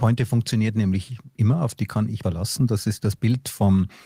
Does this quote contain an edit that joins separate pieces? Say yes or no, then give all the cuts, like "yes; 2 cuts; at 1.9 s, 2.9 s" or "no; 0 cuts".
yes; 1 cut; at 2.2 s